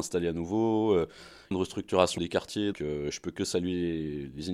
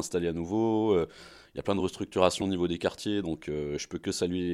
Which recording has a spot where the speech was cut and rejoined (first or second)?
first